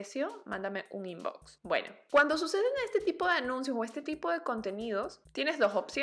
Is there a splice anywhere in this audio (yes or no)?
no